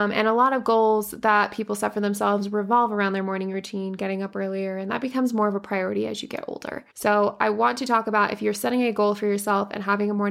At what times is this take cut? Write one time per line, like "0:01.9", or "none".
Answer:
0:06.9